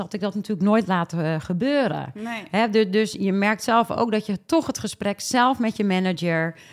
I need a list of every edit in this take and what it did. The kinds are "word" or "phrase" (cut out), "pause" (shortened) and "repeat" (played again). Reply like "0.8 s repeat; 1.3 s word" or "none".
none